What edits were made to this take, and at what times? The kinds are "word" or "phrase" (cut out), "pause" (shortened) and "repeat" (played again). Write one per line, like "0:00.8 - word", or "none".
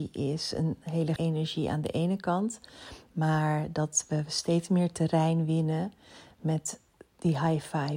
0:01.2 - word